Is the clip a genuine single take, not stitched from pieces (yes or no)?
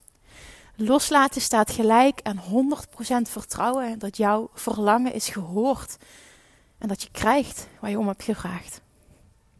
yes